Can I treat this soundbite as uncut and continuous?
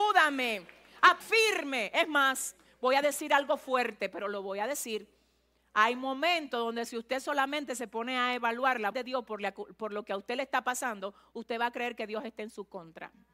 no; 2 cuts; at 1.2 s, 8.9 s

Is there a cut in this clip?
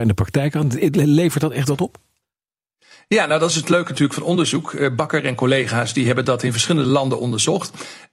no; 0 cuts

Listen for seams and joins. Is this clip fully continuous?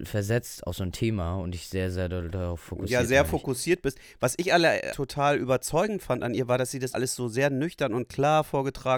no; 2 cuts; at 4.9 s, 6.9 s

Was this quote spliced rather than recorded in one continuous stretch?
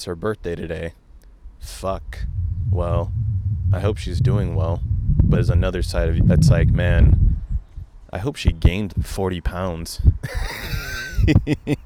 yes; 3 cuts; at 5.3 s, 6.2 s, 8.9 s

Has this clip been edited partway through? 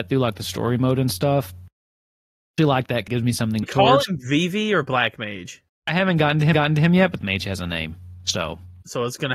yes; 5 cuts; at 2.6 s, 3.1 s, 3.6 s, 6.5 s, 7.2 s

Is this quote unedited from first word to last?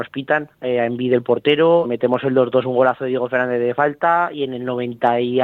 no; 1 cut; at 1.8 s

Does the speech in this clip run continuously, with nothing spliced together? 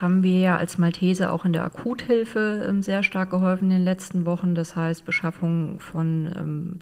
yes; 0 cuts

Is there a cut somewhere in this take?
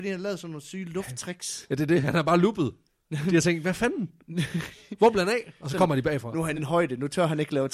yes; 1 cut; at 6.6 s

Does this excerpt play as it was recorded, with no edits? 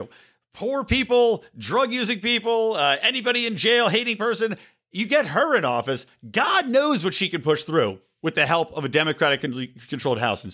yes; 0 cuts

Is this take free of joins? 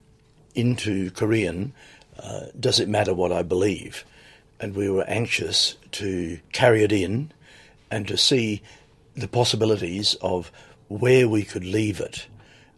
yes; 0 cuts

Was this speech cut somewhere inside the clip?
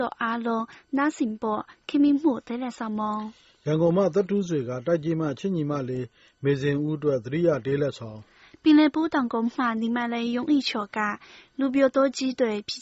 no; 0 cuts

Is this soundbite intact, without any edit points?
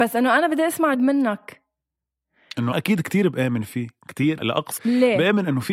no; 4 cuts; at 0.9 s, 2.7 s, 4.4 s, 4.8 s

